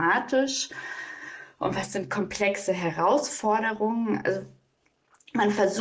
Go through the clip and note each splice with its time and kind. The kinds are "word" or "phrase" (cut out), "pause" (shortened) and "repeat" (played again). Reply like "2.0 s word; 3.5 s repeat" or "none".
none